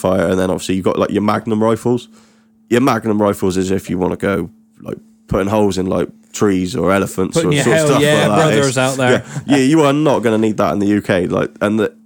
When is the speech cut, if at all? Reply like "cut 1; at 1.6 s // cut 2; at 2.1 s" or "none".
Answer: none